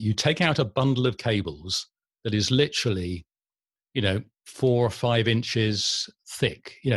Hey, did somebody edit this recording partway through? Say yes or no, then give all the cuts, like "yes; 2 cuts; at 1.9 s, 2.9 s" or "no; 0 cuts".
no; 0 cuts